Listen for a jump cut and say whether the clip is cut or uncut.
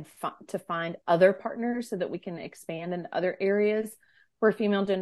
uncut